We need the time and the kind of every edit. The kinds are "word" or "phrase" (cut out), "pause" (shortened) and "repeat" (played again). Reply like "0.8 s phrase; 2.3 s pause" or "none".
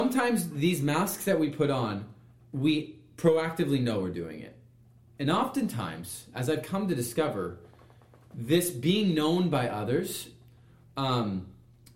none